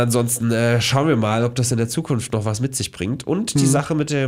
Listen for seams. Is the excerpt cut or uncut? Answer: uncut